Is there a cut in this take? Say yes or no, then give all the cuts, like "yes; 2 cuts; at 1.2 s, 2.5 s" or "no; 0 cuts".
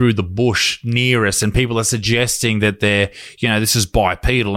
no; 0 cuts